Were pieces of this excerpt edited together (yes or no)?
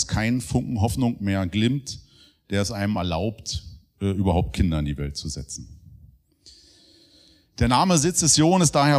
no